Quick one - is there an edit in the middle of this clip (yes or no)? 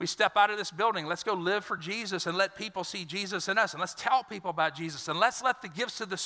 no